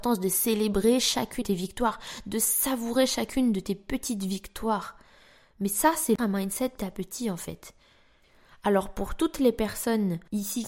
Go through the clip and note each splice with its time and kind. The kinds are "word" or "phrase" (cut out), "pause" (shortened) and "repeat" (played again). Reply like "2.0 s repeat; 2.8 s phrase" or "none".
1.4 s word; 6.2 s word; 6.8 s word